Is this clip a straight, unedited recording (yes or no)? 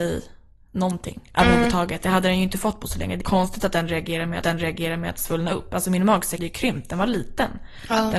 no